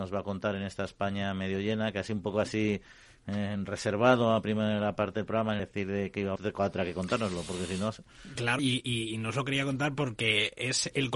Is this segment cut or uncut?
cut